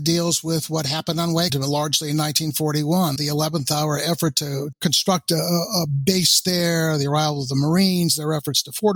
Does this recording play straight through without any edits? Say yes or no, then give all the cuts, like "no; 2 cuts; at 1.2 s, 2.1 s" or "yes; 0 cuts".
no; 2 cuts; at 1.5 s, 3.2 s